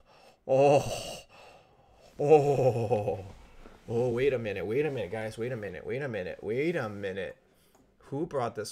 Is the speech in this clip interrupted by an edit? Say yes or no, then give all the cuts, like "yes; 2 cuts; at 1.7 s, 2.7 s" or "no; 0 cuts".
no; 0 cuts